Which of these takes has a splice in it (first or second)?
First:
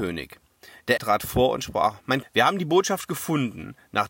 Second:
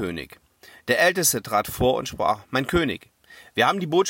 first